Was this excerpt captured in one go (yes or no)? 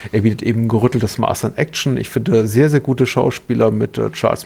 yes